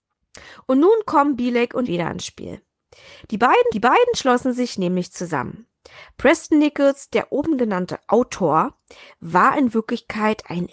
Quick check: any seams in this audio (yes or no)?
yes